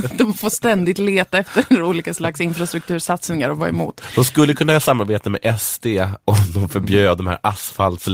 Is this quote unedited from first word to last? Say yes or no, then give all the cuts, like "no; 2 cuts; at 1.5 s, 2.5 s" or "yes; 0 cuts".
no; 1 cut; at 6.2 s